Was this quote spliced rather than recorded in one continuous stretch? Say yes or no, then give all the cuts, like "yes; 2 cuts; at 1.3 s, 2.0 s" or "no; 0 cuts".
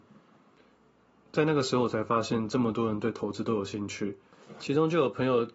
no; 0 cuts